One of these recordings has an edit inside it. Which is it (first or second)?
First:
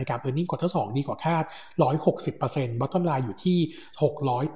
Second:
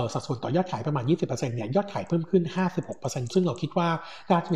second